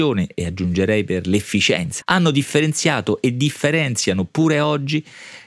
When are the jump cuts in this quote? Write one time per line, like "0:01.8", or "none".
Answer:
0:02.0